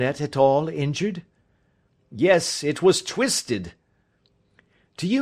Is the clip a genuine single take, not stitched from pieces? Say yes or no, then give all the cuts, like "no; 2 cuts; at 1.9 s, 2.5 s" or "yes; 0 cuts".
yes; 0 cuts